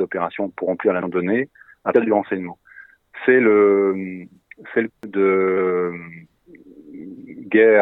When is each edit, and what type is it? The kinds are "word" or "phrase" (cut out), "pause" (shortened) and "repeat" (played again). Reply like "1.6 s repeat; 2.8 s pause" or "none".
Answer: 1.0 s word; 1.9 s word; 4.9 s word